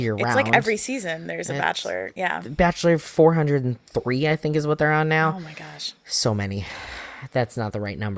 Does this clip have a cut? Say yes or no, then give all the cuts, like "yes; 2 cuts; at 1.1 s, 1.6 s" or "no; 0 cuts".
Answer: no; 0 cuts